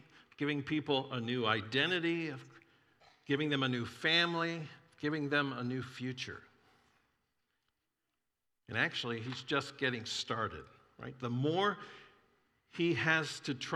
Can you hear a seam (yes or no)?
no